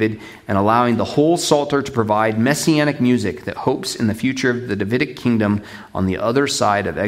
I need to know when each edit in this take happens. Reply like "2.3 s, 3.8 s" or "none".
none